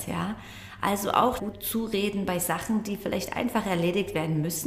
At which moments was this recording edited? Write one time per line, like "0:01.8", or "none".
0:01.4